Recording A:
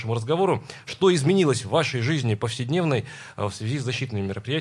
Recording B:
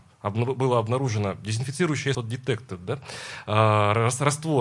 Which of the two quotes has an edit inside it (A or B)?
B